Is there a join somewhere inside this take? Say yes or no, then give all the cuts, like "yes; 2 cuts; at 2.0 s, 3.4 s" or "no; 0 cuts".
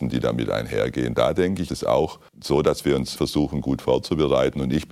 yes; 3 cuts; at 1.7 s, 2.3 s, 3.2 s